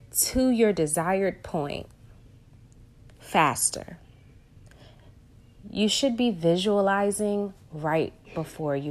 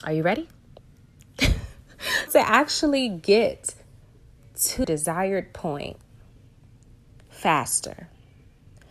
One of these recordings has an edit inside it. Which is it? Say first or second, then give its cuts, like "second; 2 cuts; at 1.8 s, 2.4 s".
second; 2 cuts; at 2.3 s, 4.8 s